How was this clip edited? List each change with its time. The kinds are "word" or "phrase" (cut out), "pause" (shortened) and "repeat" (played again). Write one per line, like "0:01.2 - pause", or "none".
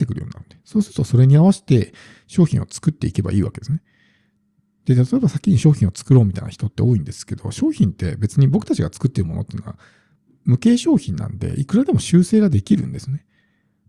none